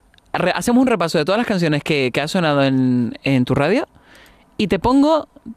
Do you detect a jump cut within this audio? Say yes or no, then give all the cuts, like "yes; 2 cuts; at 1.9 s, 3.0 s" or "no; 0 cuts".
no; 0 cuts